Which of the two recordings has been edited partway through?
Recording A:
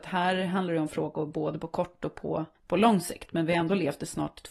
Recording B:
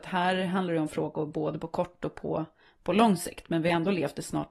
A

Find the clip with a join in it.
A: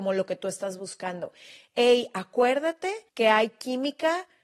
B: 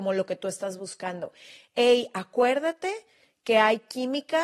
A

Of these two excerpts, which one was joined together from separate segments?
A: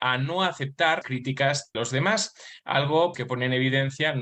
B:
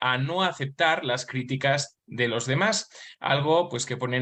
A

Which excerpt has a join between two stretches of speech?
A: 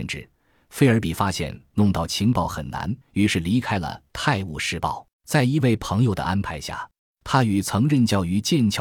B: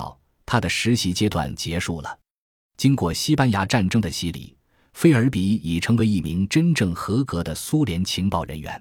A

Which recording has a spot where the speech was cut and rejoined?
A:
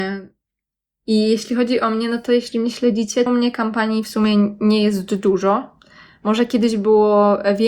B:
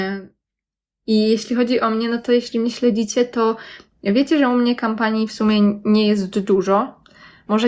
A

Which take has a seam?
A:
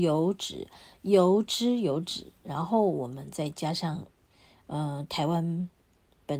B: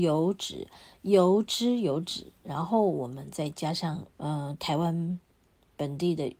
B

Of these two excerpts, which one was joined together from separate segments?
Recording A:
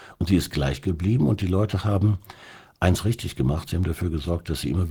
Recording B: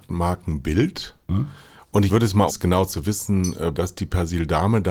B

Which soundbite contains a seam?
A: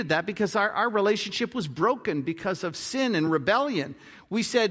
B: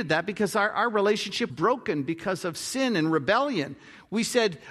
B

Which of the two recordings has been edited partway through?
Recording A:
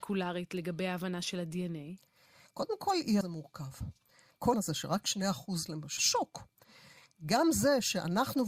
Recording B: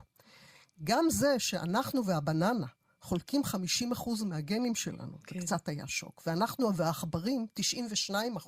A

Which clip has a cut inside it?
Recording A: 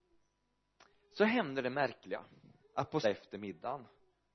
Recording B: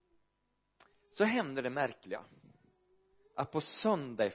A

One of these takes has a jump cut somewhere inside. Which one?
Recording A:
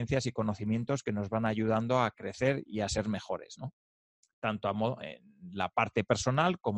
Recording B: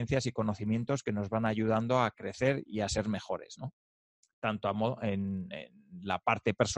A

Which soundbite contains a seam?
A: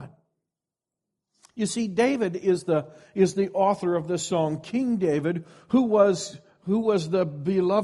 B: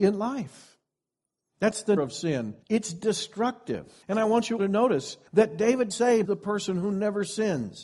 B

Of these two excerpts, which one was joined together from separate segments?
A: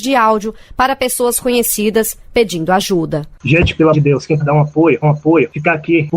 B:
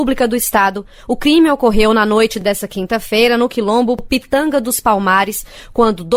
A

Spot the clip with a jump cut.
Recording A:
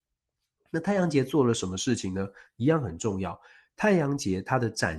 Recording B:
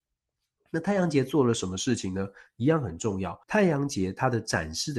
B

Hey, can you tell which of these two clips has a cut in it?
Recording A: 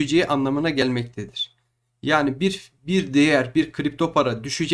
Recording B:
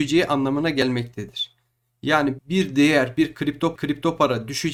B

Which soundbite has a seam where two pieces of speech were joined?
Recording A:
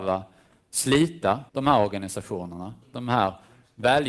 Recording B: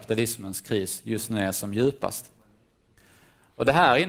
A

